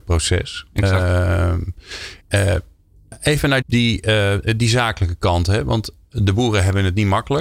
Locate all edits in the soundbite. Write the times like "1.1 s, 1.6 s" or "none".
2.2 s, 3.6 s, 6.0 s